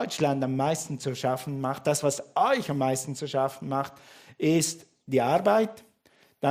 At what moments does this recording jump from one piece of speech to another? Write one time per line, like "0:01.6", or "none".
none